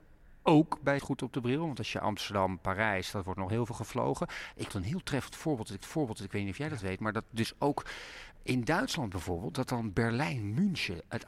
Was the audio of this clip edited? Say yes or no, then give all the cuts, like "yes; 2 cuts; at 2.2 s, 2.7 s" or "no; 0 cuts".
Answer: yes; 3 cuts; at 1.0 s, 4.7 s, 5.8 s